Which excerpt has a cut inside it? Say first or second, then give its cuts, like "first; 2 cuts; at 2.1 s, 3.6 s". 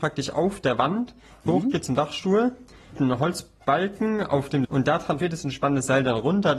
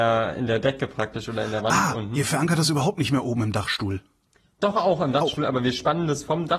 first; 4 cuts; at 1.5 s, 3.0 s, 4.6 s, 5.2 s